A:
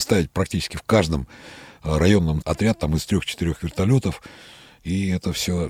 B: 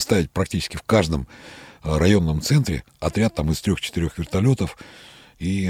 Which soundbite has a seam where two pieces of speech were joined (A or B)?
A